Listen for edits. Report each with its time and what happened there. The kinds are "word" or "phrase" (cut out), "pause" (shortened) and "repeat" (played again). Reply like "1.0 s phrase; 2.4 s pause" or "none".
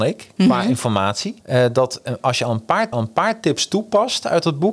1.4 s pause; 2.9 s repeat